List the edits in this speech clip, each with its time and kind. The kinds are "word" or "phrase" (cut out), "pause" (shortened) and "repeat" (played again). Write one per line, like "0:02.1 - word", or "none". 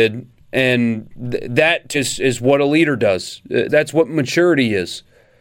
0:01.9 - word
0:03.7 - word